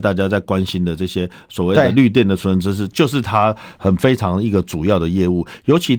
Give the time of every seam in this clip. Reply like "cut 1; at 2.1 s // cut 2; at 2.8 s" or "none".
none